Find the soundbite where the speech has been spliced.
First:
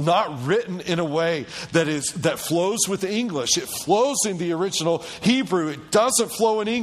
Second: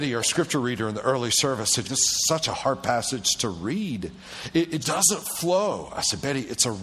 second; 2 cuts; at 1.8 s, 4.8 s

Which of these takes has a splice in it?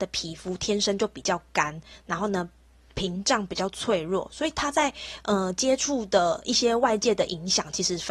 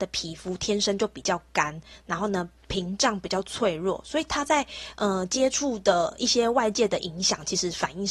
second; 1 cut; at 2.6 s

